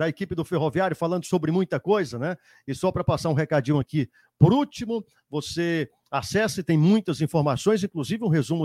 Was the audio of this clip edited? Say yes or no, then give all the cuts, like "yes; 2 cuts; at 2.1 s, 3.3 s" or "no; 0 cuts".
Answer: no; 0 cuts